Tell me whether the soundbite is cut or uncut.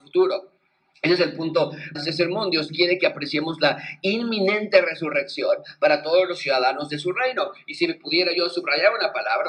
cut